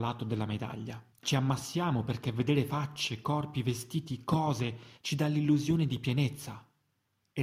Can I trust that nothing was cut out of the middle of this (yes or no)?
no